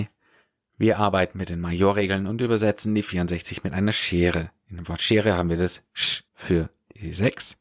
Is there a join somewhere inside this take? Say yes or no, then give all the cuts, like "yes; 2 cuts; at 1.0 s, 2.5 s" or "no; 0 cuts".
yes; 1 cut; at 6.3 s